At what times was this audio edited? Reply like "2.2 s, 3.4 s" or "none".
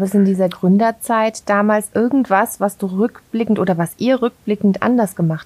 none